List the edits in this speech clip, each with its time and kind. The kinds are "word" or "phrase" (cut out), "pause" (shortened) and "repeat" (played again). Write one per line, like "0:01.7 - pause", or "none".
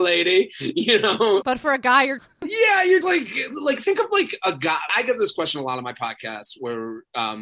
0:02.2 - phrase
0:03.0 - word
0:03.5 - word
0:04.9 - word